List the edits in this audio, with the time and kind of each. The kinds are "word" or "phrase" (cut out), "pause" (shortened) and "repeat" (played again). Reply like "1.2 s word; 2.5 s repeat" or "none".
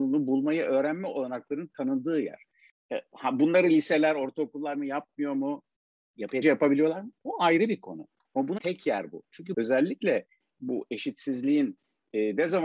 4.7 s word; 6.4 s word; 8.6 s word; 9.5 s word

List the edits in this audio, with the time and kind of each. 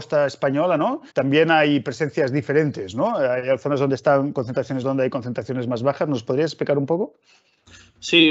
1.1 s pause; 4.8 s phrase

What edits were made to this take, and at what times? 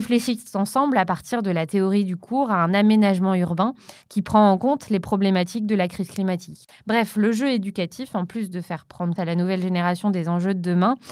9.2 s word

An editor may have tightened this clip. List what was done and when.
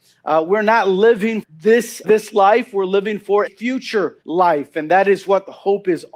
1.4 s word; 2.0 s word; 3.5 s word; 4.2 s pause

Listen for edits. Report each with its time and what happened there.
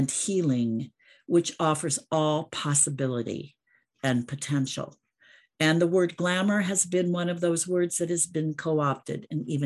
none

